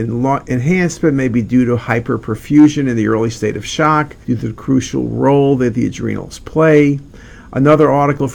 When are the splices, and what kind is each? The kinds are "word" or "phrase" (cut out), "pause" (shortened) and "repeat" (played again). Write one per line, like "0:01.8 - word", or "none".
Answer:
0:04.2 - pause